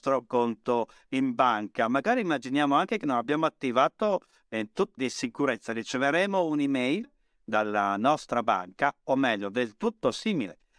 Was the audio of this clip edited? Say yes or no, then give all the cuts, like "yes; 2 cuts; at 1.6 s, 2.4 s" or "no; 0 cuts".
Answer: yes; 1 cut; at 5.0 s